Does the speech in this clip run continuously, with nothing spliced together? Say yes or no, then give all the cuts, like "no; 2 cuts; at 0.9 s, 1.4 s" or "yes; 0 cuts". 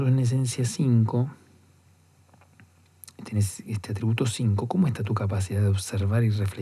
yes; 0 cuts